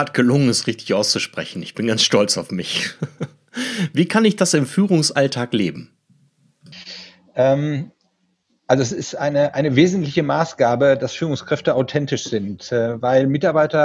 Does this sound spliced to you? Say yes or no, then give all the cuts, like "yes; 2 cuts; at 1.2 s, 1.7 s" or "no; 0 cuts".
no; 0 cuts